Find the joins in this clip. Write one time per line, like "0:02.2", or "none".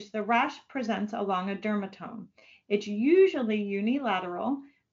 none